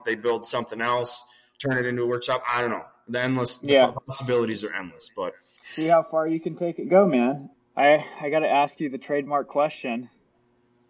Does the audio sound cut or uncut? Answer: uncut